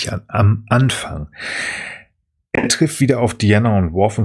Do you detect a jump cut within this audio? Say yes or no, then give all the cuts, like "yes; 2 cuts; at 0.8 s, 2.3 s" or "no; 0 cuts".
no; 0 cuts